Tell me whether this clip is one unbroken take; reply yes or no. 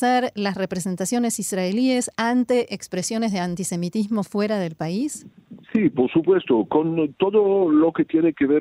no